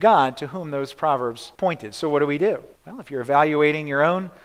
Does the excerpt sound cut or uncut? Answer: cut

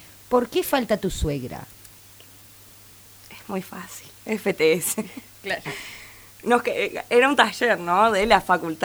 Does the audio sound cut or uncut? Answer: uncut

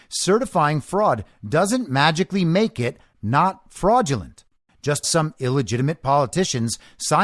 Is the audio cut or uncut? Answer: cut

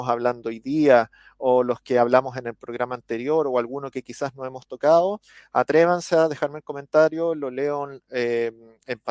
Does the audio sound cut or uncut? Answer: uncut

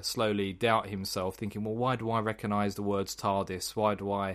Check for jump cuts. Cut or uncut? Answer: uncut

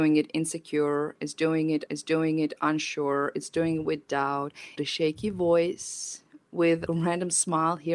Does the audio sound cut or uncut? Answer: cut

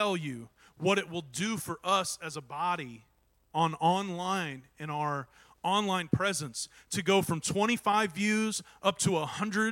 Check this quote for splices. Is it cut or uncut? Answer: uncut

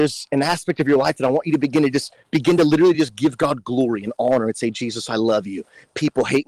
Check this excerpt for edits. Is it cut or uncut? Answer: uncut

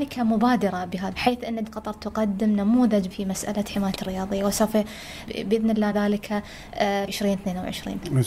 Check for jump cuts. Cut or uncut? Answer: cut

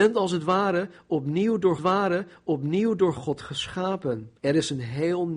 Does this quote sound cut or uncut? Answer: cut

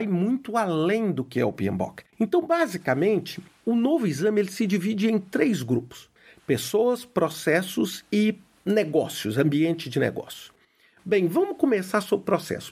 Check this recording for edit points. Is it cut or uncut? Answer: cut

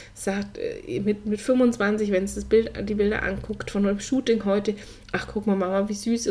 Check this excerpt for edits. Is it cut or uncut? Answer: uncut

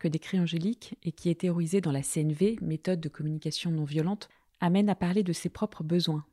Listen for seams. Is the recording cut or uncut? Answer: uncut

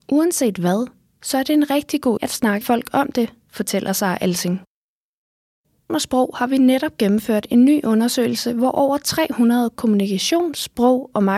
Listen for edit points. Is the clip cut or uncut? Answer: cut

